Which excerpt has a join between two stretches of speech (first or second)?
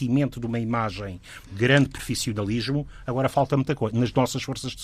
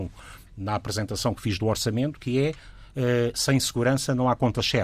first